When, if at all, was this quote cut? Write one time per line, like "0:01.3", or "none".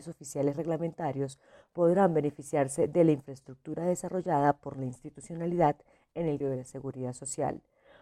0:06.4